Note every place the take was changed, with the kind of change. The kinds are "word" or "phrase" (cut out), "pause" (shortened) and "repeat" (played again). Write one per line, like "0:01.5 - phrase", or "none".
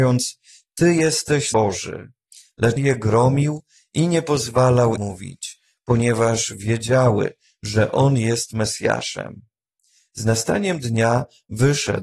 0:01.5 - word
0:02.8 - word
0:05.0 - word